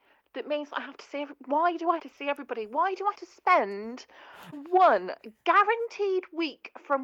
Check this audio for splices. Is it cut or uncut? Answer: cut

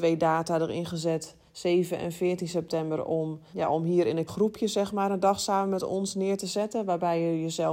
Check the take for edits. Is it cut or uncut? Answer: cut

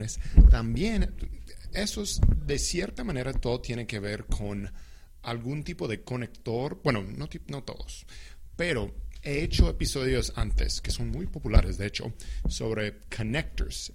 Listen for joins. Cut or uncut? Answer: uncut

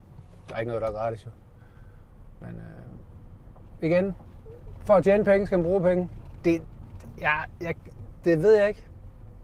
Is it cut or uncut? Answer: uncut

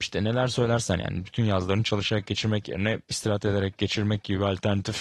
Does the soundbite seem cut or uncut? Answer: uncut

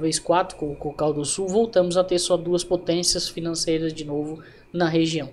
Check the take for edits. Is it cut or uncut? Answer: uncut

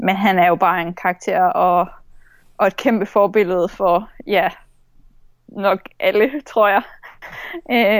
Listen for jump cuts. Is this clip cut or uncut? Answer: uncut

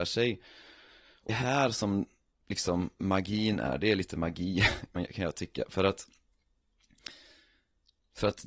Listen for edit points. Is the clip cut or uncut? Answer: cut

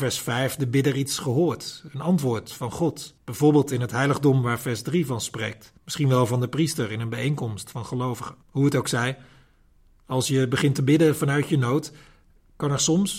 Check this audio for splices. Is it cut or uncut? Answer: cut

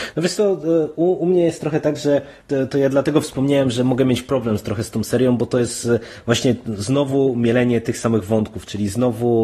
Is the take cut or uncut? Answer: cut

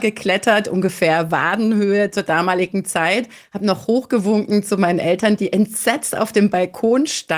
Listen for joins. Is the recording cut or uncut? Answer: uncut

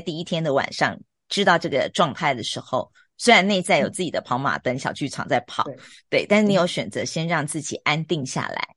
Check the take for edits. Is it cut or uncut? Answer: uncut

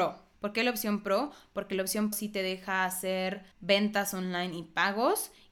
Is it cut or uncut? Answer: cut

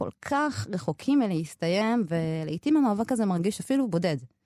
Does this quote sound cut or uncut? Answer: uncut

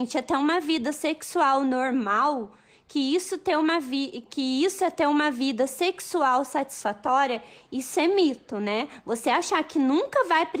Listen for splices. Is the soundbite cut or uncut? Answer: uncut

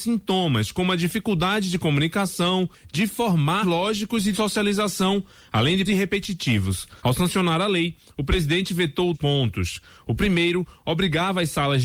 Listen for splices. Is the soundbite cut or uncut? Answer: cut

